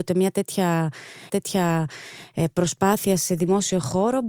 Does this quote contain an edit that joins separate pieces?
yes; 1 cut; at 1.3 s

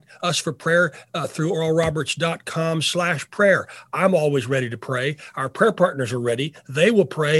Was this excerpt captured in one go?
yes; 0 cuts

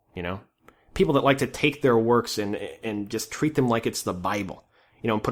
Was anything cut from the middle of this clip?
no; 0 cuts

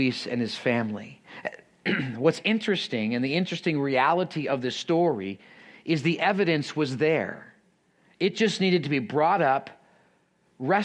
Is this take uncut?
yes; 0 cuts

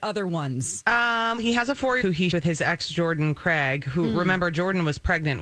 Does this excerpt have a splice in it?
yes; 3 cuts; at 1.4 s, 2.0 s, 2.3 s

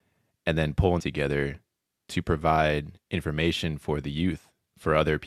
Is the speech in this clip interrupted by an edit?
yes; 1 cut; at 1.0 s

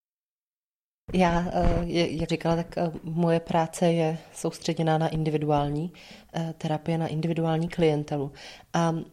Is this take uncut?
no; 1 cut; at 2.3 s

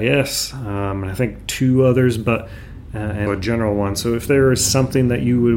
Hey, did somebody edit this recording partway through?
yes; 1 cut; at 3.3 s

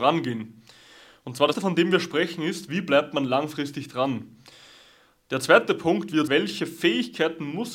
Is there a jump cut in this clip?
yes; 2 cuts; at 1.5 s, 6.3 s

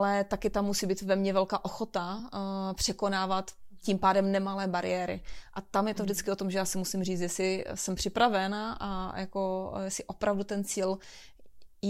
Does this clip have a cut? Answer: no; 0 cuts

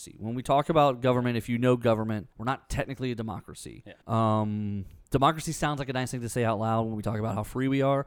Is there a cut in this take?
yes; 2 cuts; at 2.3 s, 4.0 s

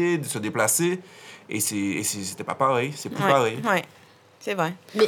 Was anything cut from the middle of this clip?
no; 0 cuts

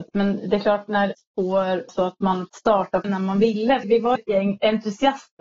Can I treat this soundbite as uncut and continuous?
no; 6 cuts; at 1.1 s, 1.9 s, 2.5 s, 3.0 s, 3.8 s, 4.2 s

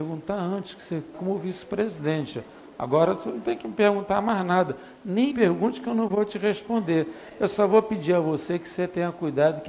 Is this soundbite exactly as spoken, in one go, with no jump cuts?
no; 2 cuts; at 1.1 s, 5.3 s

